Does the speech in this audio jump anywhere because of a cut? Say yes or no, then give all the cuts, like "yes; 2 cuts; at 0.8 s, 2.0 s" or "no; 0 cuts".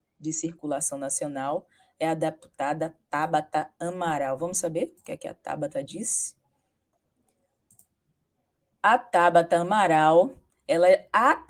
no; 0 cuts